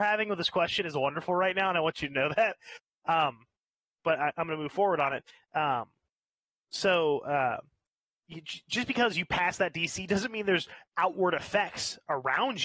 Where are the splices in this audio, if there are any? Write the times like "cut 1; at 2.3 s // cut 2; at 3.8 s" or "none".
none